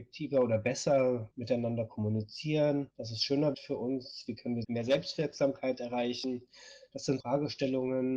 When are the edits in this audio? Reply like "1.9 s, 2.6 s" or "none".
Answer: 2.9 s, 3.5 s, 7.2 s